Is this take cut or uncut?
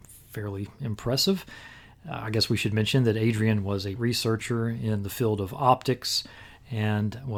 cut